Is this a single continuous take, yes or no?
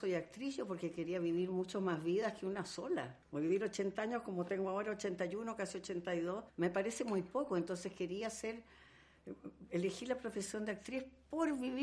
no